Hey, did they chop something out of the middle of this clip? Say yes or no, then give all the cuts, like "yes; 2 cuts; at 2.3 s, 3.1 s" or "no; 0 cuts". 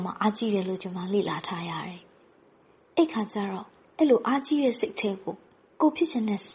no; 0 cuts